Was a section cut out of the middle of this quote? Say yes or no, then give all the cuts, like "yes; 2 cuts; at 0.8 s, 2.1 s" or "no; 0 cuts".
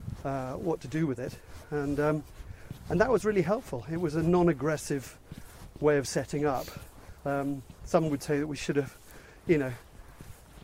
yes; 1 cut; at 7.2 s